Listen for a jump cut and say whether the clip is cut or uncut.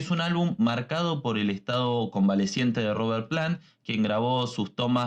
uncut